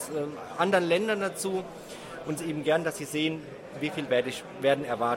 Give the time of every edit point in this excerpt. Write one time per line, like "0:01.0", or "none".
0:02.4
0:04.1